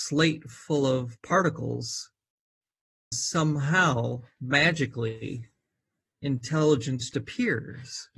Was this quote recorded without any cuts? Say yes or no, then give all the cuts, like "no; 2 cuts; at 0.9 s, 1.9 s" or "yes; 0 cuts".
no; 2 cuts; at 3.1 s, 7.1 s